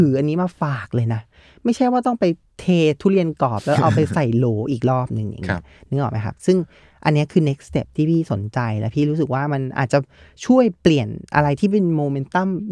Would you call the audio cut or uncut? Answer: uncut